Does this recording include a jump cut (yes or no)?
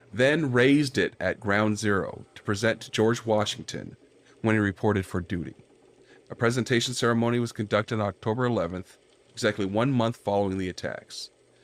no